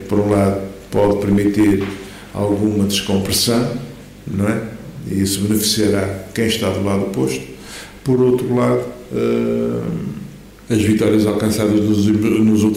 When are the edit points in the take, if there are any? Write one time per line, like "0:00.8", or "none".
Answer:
none

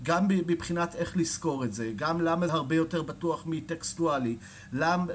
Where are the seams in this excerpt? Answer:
0:02.5

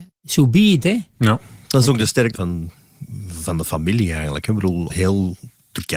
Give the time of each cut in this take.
0:02.3
0:04.9

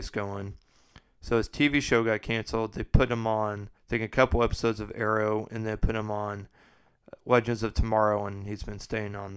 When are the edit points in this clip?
0:03.8

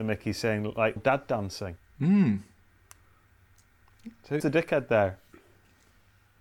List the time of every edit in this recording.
0:01.0
0:04.4

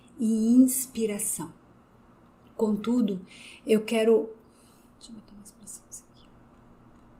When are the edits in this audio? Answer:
none

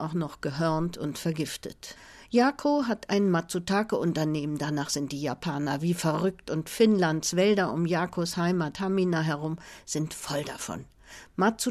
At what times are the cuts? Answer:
none

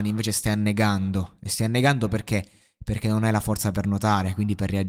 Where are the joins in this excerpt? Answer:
none

